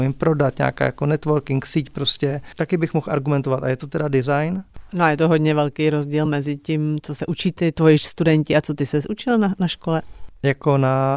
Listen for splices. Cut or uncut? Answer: uncut